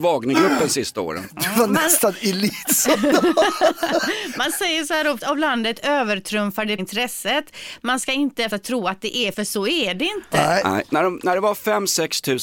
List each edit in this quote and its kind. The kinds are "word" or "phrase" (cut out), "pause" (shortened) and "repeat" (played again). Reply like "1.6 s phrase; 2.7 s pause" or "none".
5.2 s word; 6.8 s word; 8.5 s word; 9.3 s word